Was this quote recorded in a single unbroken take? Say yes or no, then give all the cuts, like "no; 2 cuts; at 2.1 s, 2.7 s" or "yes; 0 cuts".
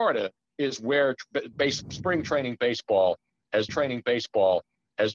no; 1 cut; at 3.7 s